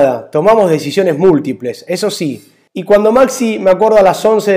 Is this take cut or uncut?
uncut